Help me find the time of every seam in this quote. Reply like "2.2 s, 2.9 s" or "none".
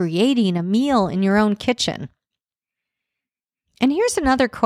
none